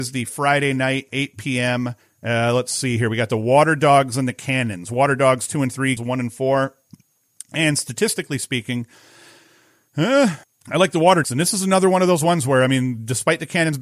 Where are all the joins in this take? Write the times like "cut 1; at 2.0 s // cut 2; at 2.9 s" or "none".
cut 1; at 1.1 s // cut 2; at 2.0 s // cut 3; at 6.0 s // cut 4; at 7.3 s // cut 5; at 10.4 s // cut 6; at 11.2 s

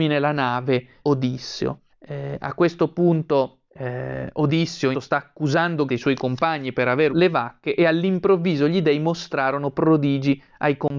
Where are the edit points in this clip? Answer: cut 1; at 1.0 s // cut 2; at 1.9 s // cut 3; at 3.7 s // cut 4; at 4.9 s // cut 5; at 5.9 s // cut 6; at 7.1 s

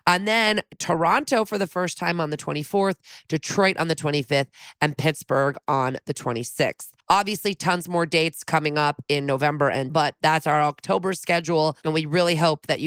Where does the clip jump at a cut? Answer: cut 1; at 7.0 s // cut 2; at 9.9 s

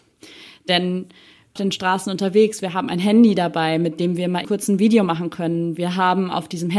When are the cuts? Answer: cut 1; at 1.6 s // cut 2; at 4.4 s

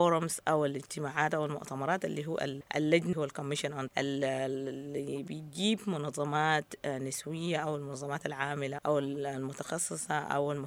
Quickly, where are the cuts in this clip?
cut 1; at 3.1 s // cut 2; at 3.9 s // cut 3; at 8.8 s

